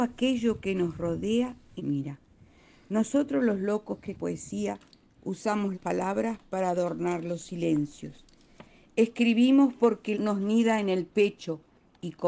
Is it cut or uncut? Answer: cut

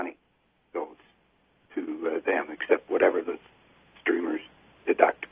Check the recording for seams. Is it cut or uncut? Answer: uncut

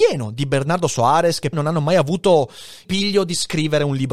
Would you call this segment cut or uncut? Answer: cut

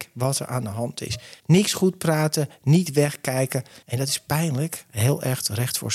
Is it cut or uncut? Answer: cut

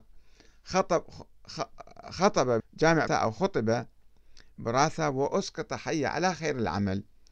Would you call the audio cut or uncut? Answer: cut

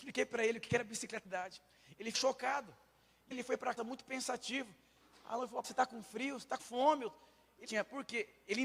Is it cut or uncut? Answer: cut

